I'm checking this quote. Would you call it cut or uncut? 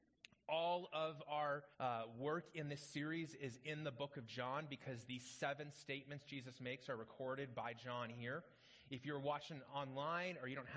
cut